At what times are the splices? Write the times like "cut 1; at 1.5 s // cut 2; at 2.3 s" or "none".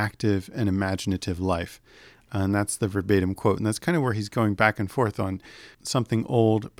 cut 1; at 5.7 s